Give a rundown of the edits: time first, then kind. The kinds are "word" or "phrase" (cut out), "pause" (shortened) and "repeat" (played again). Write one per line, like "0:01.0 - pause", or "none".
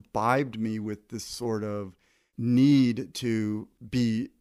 none